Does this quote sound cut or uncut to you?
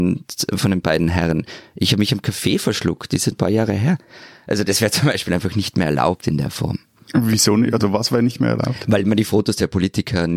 cut